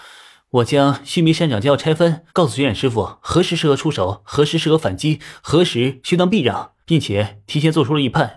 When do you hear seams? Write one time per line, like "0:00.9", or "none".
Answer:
0:02.3
0:06.8